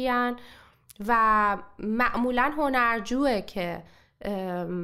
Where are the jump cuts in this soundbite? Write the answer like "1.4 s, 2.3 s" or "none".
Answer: none